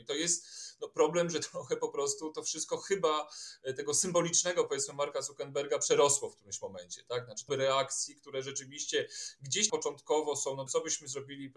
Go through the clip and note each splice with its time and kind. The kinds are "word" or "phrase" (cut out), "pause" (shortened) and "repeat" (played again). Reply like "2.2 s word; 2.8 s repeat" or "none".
7.5 s word; 9.7 s word; 10.7 s word